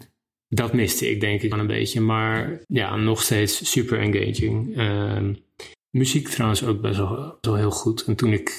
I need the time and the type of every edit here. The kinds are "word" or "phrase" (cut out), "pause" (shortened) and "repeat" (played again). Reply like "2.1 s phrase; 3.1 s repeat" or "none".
1.5 s phrase; 2.6 s pause; 5.7 s pause; 7.4 s word